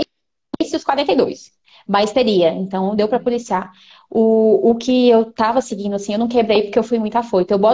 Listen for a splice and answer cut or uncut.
uncut